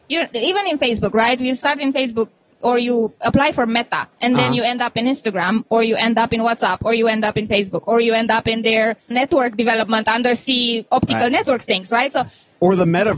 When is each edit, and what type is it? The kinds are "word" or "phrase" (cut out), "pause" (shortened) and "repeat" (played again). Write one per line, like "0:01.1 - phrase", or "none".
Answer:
0:09.1 - word